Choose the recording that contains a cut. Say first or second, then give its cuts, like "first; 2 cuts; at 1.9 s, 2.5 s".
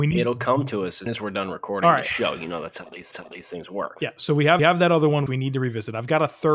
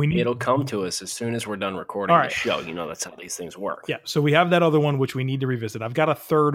first; 4 cuts; at 1.1 s, 3.1 s, 4.6 s, 5.3 s